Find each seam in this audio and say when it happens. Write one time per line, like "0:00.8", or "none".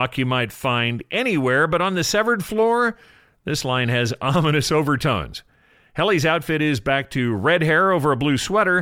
none